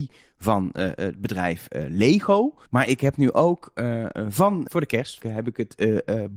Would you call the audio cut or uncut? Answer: cut